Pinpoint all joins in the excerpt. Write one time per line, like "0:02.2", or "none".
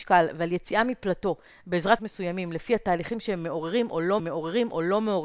0:02.0
0:04.2